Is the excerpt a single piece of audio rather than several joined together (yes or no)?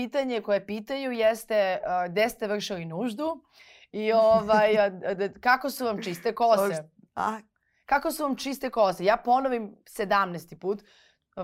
yes